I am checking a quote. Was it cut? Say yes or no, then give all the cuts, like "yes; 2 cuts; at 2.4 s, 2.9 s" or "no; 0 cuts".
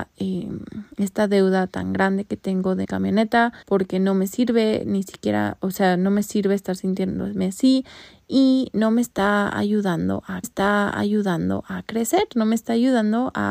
yes; 3 cuts; at 2.8 s, 3.6 s, 10.4 s